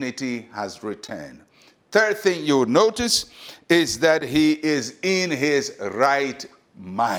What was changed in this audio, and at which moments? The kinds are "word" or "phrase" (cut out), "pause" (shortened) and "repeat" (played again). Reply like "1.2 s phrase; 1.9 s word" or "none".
none